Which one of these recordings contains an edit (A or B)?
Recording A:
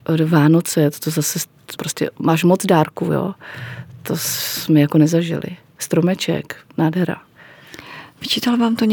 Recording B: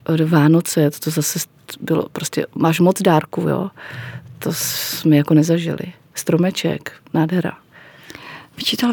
A